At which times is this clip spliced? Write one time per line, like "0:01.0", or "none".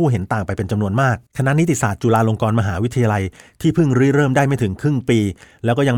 0:01.3